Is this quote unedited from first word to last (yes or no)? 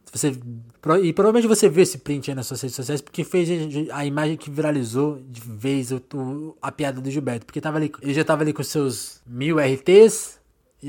yes